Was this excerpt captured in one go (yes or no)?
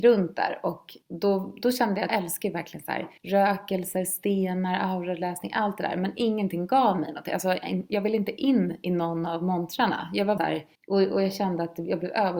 no